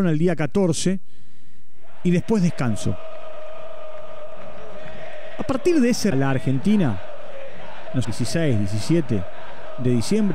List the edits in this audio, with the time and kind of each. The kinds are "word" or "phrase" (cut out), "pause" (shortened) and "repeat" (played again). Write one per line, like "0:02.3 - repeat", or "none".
0:06.1 - phrase
0:08.0 - word